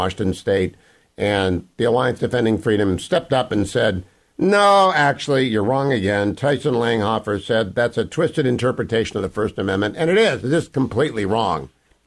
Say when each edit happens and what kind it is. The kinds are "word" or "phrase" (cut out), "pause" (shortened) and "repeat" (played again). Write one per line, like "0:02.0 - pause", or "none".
none